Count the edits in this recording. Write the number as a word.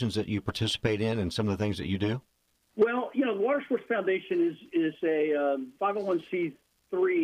one